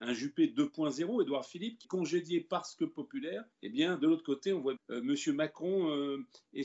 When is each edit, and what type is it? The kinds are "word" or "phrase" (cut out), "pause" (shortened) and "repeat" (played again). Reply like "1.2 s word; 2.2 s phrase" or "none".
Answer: 1.8 s phrase; 3.5 s pause; 4.8 s phrase